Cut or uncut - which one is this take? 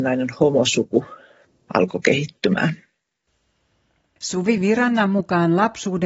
uncut